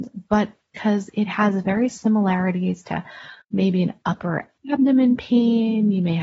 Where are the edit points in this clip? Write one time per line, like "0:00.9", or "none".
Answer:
0:03.4